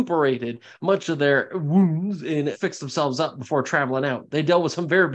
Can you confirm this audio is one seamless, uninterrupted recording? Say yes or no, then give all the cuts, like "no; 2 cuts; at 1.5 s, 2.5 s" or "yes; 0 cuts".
no; 1 cut; at 2.5 s